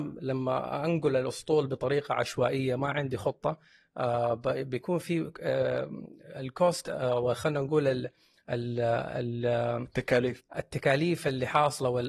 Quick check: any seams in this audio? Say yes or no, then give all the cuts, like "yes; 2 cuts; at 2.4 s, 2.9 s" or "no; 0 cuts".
no; 0 cuts